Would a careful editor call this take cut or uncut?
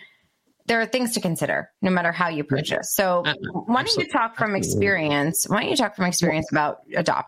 uncut